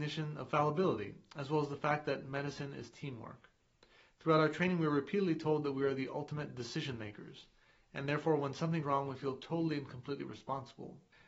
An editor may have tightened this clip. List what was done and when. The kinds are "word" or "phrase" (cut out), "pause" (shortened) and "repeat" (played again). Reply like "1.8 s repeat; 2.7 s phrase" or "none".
8.8 s word